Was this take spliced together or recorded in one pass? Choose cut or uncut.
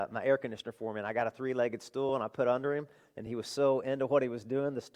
uncut